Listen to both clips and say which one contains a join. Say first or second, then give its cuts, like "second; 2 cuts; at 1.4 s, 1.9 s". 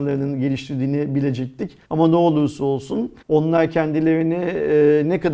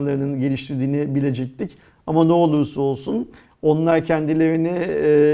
first; 2 cuts; at 1.8 s, 3.2 s